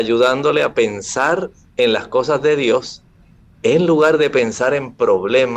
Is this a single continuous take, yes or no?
yes